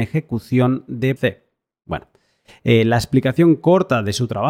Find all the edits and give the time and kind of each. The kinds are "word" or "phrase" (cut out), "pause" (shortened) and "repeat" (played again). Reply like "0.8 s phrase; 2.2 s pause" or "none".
1.2 s phrase